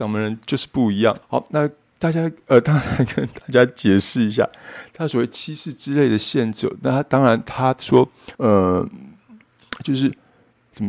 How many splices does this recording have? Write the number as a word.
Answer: two